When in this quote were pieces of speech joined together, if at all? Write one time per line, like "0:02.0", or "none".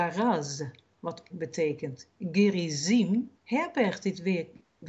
0:01.3
0:03.4